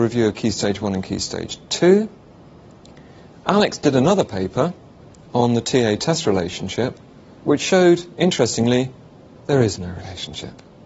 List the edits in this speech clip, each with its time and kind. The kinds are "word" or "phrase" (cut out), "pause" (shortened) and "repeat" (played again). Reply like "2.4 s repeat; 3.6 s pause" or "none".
none